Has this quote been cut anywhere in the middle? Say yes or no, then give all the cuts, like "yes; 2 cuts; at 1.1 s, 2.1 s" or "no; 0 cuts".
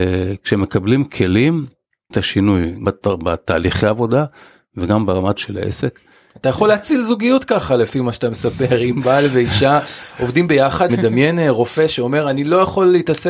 yes; 4 cuts; at 2.1 s, 2.8 s, 5.4 s, 10.9 s